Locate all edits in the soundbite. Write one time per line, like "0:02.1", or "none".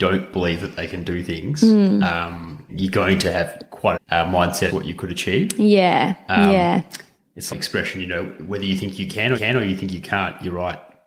0:02.7
0:03.9
0:04.7
0:07.5
0:09.3

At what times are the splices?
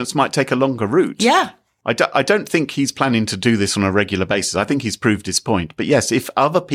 none

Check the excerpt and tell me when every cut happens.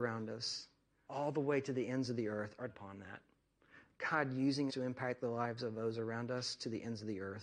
0:01.1
0:02.7
0:04.7

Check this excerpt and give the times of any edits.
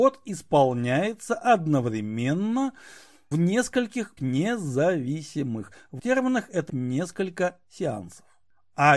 0:03.3
0:04.2
0:06.0
0:06.7

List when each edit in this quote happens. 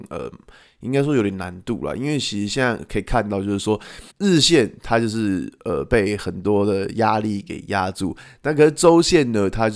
0:04.1

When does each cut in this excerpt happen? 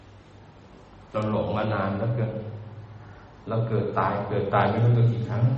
0:01.1

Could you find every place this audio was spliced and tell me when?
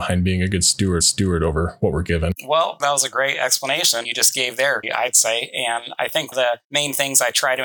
0:01.0
0:02.8
0:04.0
0:04.8
0:06.3
0:06.6

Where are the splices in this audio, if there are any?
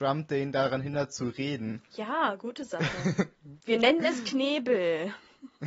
0:01.9
0:03.6

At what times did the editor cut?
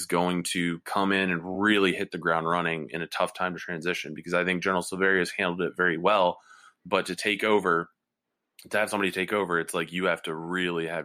none

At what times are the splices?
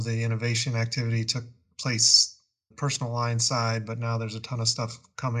0:02.7

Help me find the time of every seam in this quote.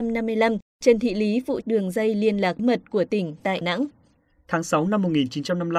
0:01.6
0:02.6
0:03.6

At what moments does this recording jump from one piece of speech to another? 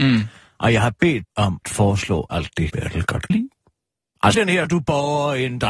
0:01.2
0:01.6
0:02.7
0:03.3
0:04.3
0:04.7

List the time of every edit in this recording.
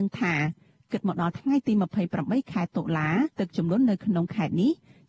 0:03.3

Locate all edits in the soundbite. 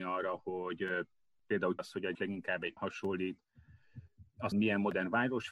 0:01.8
0:02.1
0:02.8
0:04.5

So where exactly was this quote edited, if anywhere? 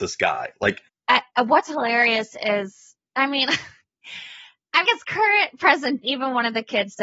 0:01.3
0:04.8
0:06.0

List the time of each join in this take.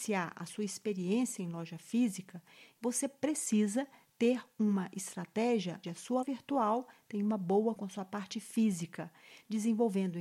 0:02.8
0:05.8
0:06.2
0:07.8

